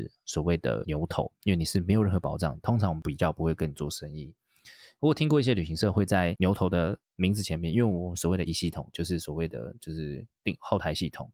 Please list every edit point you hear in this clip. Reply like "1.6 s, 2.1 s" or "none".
8.5 s